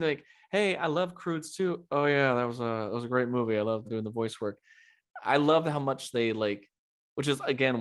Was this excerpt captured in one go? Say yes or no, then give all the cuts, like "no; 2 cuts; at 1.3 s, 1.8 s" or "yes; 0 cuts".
no; 1 cut; at 3.8 s